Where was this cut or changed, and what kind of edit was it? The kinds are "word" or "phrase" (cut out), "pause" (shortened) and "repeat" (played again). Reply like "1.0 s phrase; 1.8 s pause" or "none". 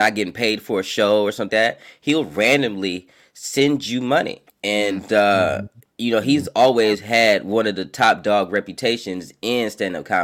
1.5 s word; 4.5 s pause